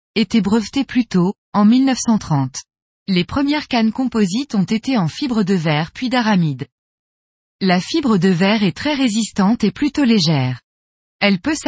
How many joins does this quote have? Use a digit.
1